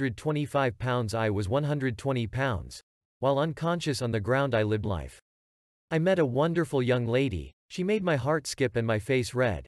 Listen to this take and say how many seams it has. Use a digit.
1